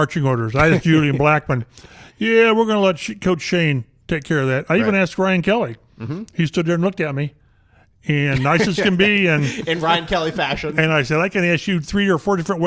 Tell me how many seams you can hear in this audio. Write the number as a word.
zero